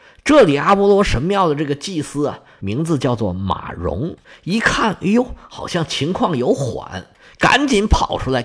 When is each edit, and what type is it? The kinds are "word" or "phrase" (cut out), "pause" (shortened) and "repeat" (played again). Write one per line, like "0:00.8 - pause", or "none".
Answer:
none